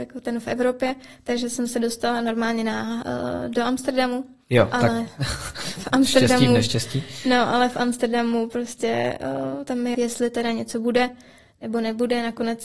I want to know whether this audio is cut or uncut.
cut